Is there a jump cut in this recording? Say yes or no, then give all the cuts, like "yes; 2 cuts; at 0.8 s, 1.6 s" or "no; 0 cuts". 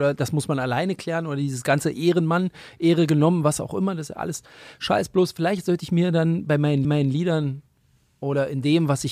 yes; 1 cut; at 6.8 s